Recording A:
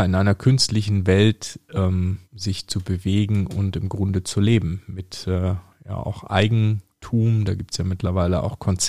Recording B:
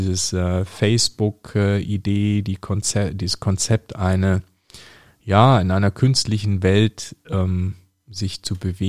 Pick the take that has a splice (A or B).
A